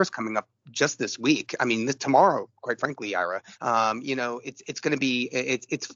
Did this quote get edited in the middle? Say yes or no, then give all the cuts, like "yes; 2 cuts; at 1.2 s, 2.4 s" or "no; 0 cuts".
yes; 1 cut; at 3.5 s